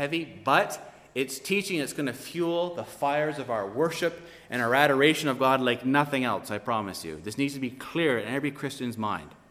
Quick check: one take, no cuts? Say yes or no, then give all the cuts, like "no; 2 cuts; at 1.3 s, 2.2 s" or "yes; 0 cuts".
yes; 0 cuts